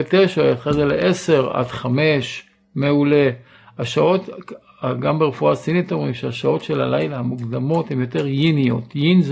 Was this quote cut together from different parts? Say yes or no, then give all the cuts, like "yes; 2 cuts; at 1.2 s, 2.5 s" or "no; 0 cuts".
no; 0 cuts